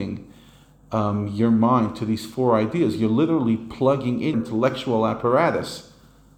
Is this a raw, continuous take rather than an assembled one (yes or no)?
no